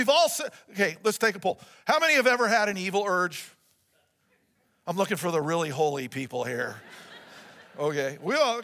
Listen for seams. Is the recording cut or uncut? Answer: uncut